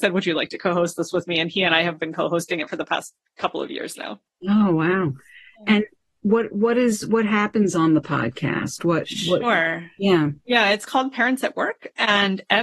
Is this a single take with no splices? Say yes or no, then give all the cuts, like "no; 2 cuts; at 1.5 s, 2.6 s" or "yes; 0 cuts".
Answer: yes; 0 cuts